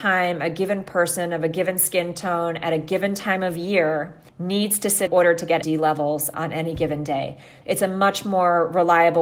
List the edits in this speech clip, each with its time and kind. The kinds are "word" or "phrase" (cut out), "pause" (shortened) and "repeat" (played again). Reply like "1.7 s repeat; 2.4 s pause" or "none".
4.3 s pause; 5.1 s phrase; 5.6 s phrase